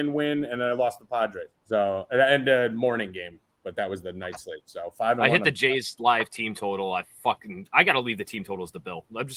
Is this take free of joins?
no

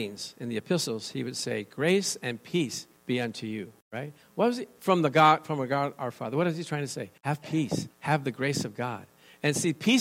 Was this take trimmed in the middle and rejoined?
yes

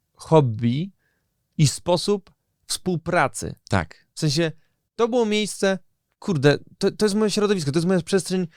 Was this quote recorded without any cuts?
yes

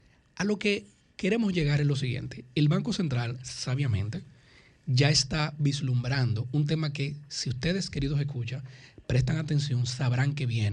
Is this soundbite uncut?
yes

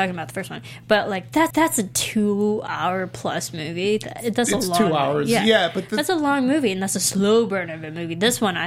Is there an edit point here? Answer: yes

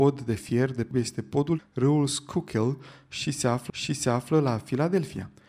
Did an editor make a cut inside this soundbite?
yes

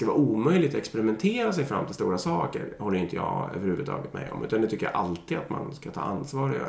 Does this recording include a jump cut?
no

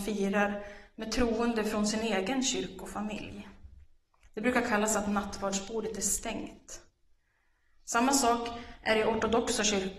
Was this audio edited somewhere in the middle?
no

